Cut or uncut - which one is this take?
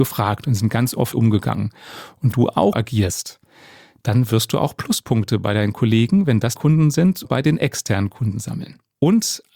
cut